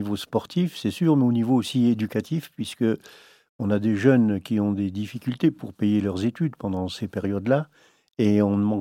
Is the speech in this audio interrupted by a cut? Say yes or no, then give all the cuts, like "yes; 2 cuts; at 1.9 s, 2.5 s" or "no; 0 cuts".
no; 0 cuts